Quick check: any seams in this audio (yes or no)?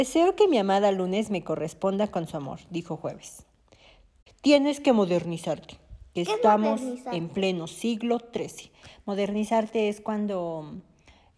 no